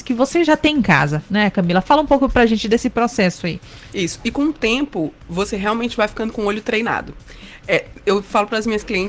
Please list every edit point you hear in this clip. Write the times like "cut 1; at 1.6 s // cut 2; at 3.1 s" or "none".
none